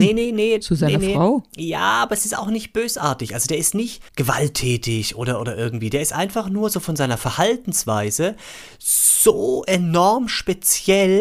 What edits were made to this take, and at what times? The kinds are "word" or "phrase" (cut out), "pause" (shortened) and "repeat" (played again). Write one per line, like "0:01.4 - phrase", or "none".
0:04.1 - pause